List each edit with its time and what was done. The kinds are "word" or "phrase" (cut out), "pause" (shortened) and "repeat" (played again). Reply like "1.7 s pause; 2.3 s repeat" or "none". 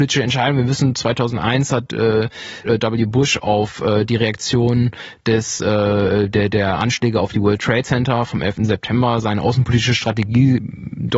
2.6 s word